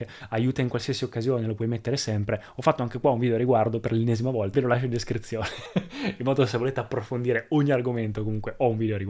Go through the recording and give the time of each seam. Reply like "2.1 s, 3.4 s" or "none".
4.5 s